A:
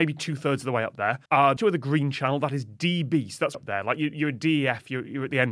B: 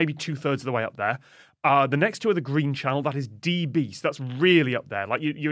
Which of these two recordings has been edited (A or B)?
A